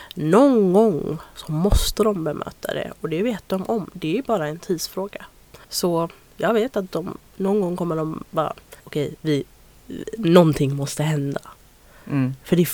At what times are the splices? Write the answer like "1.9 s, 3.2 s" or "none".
5.6 s, 8.8 s